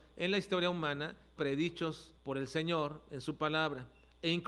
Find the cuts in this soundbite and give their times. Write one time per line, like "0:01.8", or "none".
0:01.4
0:02.2